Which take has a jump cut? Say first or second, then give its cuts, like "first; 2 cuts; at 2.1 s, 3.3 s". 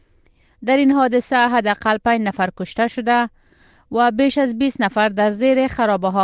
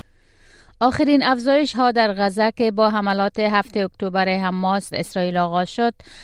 second; 2 cuts; at 1.7 s, 4.9 s